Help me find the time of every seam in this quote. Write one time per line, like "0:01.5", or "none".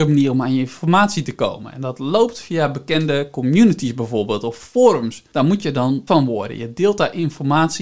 0:06.1